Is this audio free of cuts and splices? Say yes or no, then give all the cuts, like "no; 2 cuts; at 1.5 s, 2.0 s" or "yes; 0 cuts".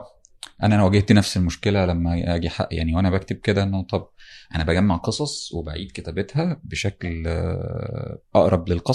yes; 0 cuts